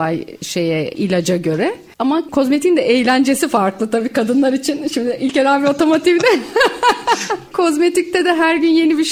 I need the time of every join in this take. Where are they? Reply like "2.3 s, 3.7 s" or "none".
none